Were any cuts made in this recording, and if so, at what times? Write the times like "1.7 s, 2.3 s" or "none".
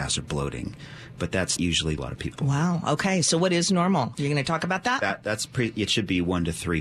1.6 s, 2.0 s